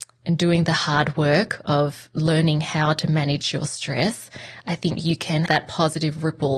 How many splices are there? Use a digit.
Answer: 1